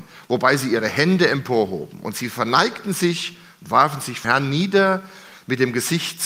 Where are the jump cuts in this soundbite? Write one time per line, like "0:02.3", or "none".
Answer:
0:04.2